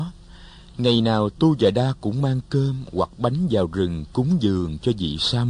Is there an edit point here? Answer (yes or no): no